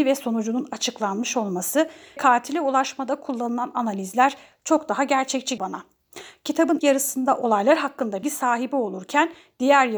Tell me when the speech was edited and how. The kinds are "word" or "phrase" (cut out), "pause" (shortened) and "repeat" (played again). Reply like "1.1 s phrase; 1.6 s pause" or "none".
2.2 s word; 5.6 s word; 6.8 s word; 8.2 s word